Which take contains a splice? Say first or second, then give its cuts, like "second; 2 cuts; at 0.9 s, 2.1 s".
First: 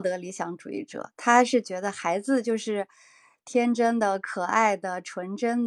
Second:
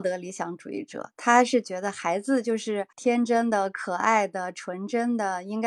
second; 1 cut; at 2.9 s